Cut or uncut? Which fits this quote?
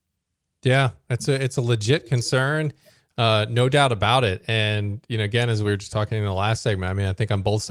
uncut